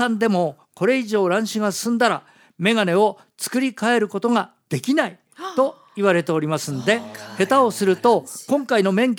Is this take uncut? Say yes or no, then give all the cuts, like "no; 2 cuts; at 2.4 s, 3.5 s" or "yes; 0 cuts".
yes; 0 cuts